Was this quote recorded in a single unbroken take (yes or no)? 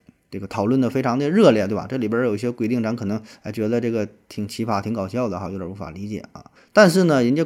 no